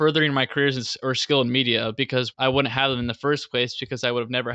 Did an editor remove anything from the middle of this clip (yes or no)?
yes